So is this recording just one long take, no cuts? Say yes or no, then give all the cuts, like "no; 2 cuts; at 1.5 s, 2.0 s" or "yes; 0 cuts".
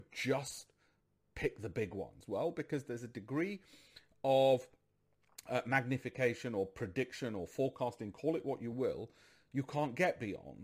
yes; 0 cuts